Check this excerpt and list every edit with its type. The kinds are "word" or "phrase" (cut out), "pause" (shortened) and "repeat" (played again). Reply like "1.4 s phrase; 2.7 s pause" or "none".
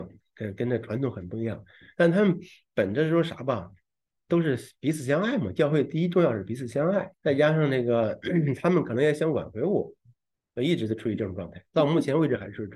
4.2 s word; 7.1 s word